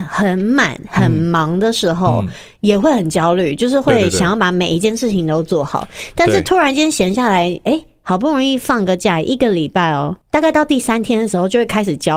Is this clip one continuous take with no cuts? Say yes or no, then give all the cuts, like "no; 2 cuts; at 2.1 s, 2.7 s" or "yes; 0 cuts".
no; 1 cut; at 10.2 s